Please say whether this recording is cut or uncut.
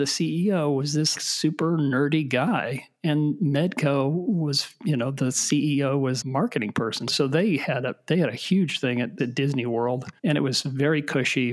cut